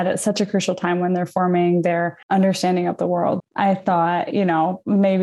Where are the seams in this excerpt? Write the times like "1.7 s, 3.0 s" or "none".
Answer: 2.2 s, 3.4 s